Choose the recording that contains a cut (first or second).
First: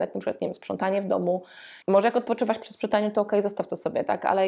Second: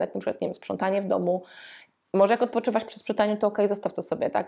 first